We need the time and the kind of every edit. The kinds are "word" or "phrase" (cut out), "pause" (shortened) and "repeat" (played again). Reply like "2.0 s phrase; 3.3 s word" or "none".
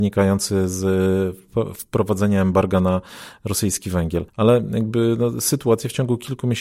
4.3 s pause

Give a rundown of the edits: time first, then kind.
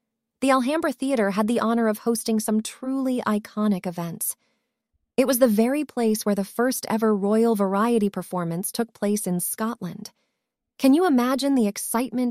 none

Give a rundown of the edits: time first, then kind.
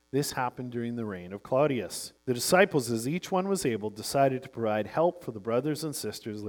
2.2 s pause

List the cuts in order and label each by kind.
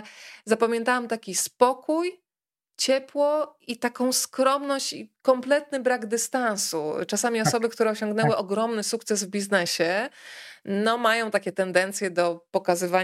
none

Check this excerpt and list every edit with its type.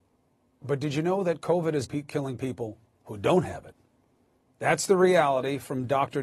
1.8 s word

